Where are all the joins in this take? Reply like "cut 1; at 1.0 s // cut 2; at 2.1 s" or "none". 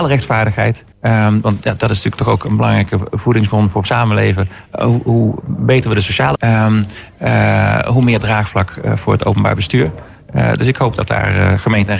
cut 1; at 0.9 s // cut 2; at 3.8 s // cut 3; at 6.3 s